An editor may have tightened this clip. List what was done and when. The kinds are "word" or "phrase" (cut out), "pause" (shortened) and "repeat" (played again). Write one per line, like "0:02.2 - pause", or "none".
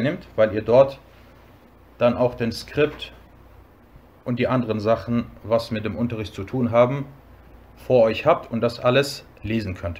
none